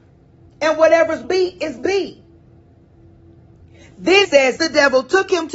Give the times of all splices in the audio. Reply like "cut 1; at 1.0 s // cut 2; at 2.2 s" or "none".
cut 1; at 1.2 s // cut 2; at 1.8 s // cut 3; at 4.2 s // cut 4; at 4.6 s